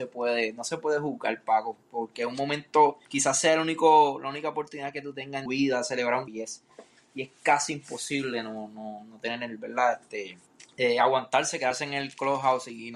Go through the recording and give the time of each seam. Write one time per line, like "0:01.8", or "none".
0:03.0
0:05.5
0:06.3
0:10.5